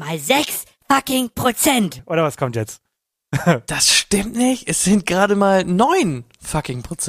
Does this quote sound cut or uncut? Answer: uncut